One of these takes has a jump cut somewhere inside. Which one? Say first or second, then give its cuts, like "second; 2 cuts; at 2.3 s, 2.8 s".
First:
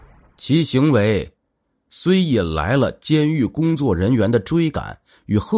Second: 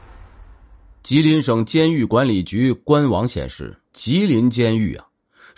second; 1 cut; at 3.8 s